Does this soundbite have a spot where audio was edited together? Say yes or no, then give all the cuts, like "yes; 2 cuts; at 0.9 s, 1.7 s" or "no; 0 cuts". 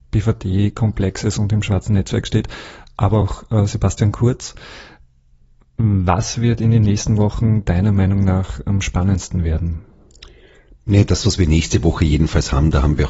no; 0 cuts